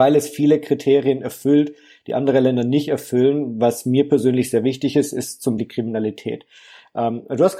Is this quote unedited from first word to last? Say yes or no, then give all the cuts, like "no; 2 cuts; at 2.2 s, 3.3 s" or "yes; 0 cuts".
no; 1 cut; at 5.6 s